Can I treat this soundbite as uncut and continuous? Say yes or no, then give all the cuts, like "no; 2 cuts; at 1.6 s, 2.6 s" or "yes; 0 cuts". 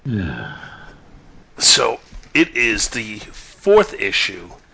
yes; 0 cuts